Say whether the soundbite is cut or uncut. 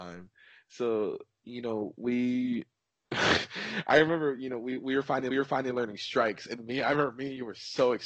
cut